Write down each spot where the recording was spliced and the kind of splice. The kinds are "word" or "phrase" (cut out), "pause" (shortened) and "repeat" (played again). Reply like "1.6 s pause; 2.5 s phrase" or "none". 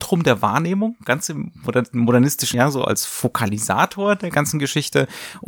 2.5 s word; 4.3 s word

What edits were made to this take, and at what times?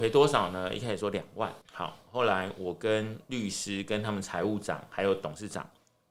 1.6 s pause

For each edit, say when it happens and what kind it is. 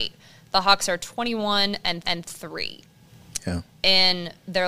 2.0 s repeat

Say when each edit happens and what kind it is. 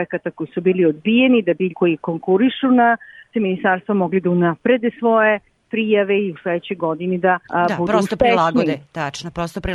1.7 s word; 3.3 s word; 7.4 s pause

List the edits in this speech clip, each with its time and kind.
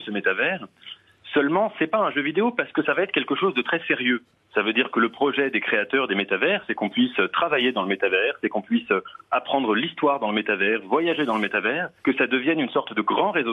12.0 s pause

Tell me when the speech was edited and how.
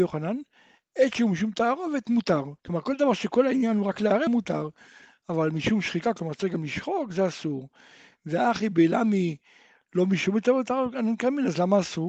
2.6 s pause; 4.3 s word

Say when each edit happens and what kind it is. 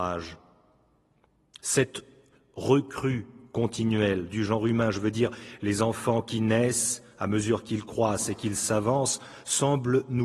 none

